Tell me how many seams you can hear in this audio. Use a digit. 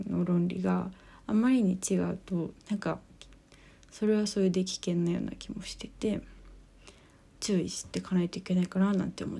0